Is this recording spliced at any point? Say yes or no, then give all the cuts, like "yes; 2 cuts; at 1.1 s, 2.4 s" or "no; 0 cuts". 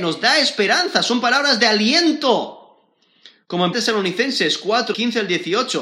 yes; 2 cuts; at 3.7 s, 4.9 s